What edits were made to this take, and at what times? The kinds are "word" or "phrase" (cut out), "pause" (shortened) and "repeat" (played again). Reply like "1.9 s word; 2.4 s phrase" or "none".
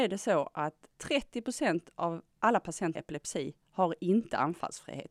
0.9 s pause; 2.9 s word